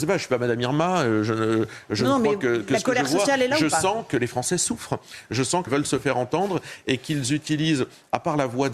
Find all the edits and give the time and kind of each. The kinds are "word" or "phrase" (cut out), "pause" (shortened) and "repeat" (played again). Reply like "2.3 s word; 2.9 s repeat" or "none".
5.7 s phrase